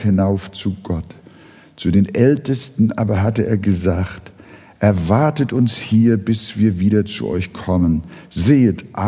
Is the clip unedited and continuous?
yes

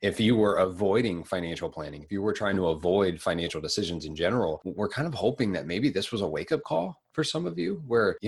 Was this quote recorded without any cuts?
yes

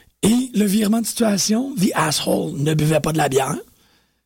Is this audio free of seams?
yes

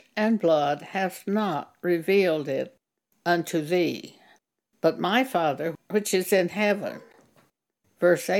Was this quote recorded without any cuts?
yes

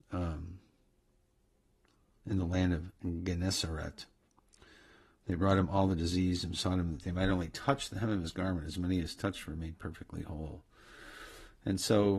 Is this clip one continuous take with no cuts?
yes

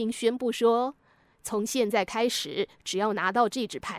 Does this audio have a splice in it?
yes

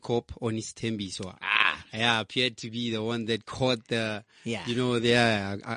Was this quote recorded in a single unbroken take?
yes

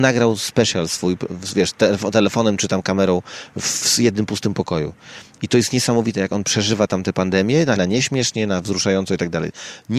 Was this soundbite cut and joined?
yes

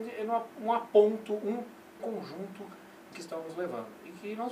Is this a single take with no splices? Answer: no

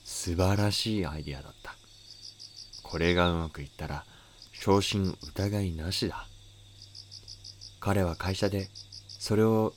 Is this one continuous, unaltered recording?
no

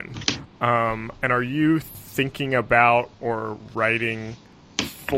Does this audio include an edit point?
no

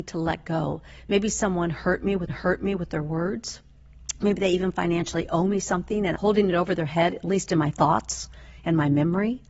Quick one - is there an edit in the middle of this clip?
yes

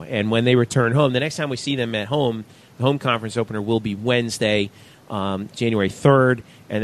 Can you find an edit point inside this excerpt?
no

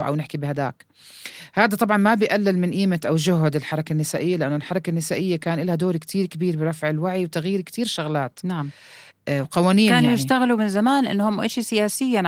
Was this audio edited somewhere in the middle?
no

